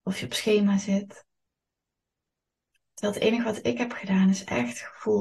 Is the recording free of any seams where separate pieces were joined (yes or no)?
yes